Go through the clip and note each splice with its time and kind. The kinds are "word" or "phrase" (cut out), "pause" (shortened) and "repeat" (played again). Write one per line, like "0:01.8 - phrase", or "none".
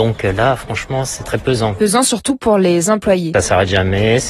none